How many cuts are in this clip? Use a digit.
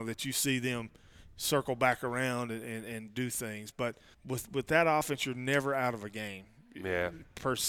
1